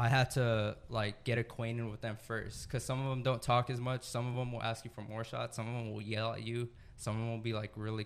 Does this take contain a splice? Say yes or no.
no